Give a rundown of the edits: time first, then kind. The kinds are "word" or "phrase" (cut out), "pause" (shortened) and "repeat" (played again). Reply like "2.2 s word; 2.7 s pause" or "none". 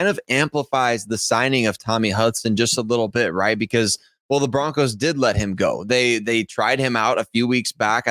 none